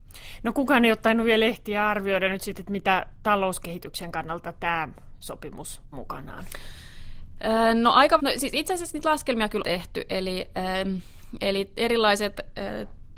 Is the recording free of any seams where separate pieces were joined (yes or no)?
no